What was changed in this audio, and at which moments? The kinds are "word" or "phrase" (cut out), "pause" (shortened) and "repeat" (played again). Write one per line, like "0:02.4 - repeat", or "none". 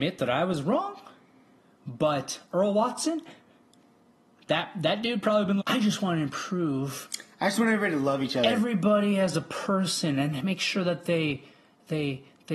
0:05.6 - word